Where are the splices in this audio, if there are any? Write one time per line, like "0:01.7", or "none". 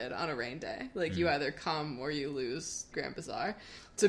0:02.9